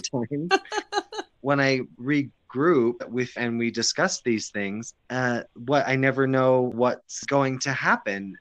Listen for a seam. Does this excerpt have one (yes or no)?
yes